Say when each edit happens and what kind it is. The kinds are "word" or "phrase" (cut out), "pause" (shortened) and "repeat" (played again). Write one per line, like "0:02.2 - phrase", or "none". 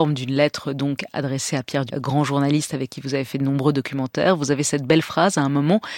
0:01.9 - word